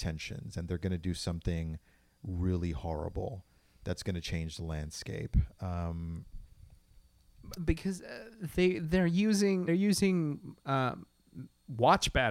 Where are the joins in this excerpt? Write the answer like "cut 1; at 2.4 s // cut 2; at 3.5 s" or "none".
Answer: cut 1; at 7.6 s // cut 2; at 9.7 s